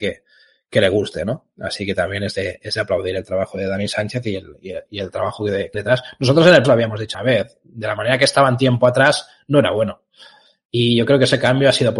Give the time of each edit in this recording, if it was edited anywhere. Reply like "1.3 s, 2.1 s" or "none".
5.7 s, 6.6 s, 7.1 s